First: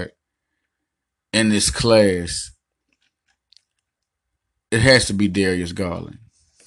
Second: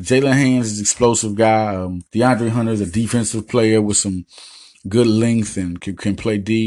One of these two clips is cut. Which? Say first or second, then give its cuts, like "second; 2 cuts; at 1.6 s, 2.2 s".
second; 1 cut; at 2.1 s